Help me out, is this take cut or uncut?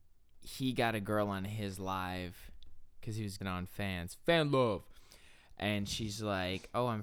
cut